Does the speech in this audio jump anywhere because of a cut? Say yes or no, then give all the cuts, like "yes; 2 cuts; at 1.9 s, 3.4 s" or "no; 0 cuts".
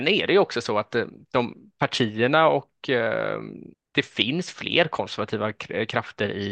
yes; 1 cut; at 3.7 s